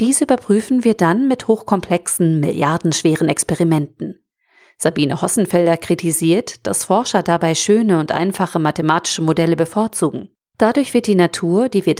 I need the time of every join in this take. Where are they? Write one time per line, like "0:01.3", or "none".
0:10.4